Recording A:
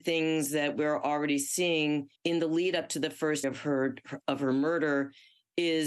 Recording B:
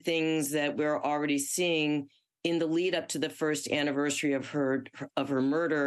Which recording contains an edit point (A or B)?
A